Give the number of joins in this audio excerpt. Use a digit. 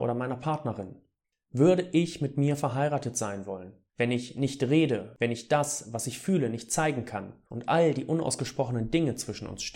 3